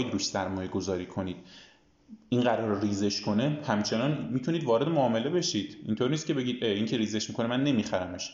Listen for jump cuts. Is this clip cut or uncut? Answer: uncut